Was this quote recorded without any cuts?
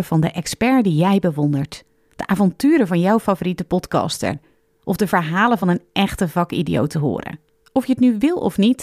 yes; 0 cuts

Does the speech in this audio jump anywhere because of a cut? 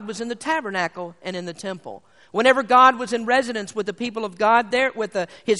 no; 0 cuts

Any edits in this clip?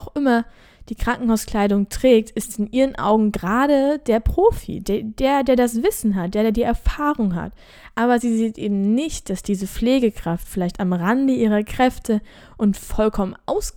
no; 0 cuts

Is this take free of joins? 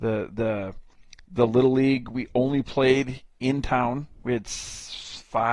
yes; 0 cuts

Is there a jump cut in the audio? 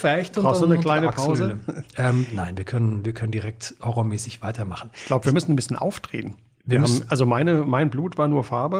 no; 0 cuts

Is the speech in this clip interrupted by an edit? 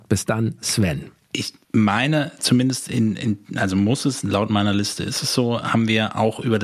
no; 0 cuts

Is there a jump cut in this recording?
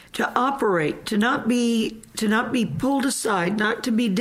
no; 0 cuts

